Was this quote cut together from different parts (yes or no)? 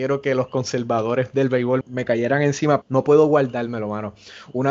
yes